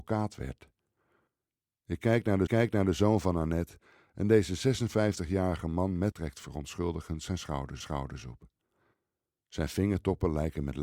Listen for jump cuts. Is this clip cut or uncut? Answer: cut